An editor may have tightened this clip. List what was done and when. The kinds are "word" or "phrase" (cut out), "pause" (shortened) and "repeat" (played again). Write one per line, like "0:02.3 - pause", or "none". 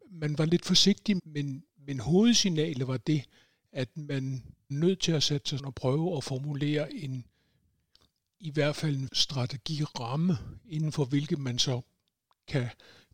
0:01.2 - word
0:04.7 - word
0:05.6 - word
0:09.1 - word